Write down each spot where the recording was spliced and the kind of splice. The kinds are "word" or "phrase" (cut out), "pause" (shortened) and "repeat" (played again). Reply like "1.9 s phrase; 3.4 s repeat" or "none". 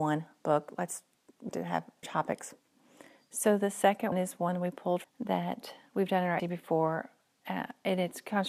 1.5 s word; 2.0 s word; 4.1 s word; 5.0 s word; 6.4 s word